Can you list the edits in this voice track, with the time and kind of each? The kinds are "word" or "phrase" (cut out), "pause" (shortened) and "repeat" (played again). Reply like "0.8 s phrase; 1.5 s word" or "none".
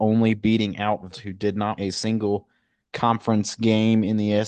1.1 s word; 1.8 s word